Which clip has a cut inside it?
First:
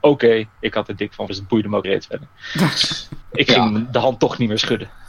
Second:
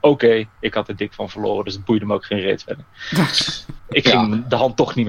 first; 2 cuts; at 1.3 s, 1.8 s

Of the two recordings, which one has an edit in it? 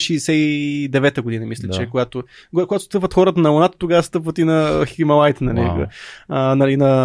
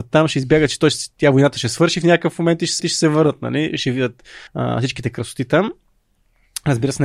second; 2 cuts; at 2.8 s, 4.5 s

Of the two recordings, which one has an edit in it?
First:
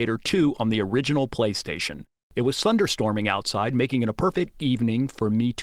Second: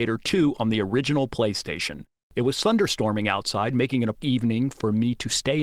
second; 1 cut; at 4.2 s

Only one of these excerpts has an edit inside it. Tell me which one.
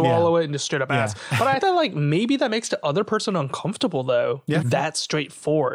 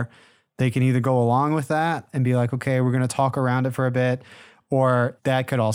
first; 2 cuts; at 1.6 s, 4.6 s

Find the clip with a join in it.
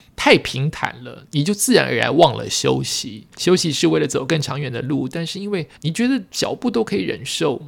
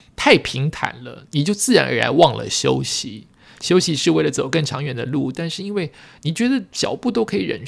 first; 2 cuts; at 3.3 s, 5.8 s

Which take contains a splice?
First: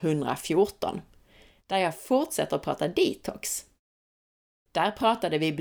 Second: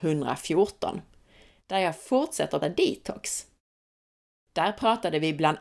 second; 1 cut; at 2.6 s

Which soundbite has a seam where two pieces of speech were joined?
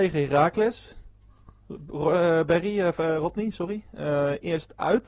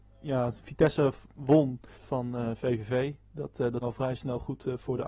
second; 2 cuts; at 1.9 s, 3.8 s

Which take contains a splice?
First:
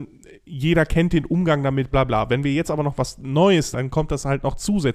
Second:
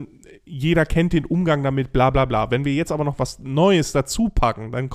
first; 2 cuts; at 1.9 s, 3.7 s

